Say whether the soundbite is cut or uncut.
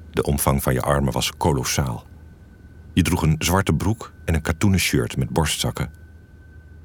uncut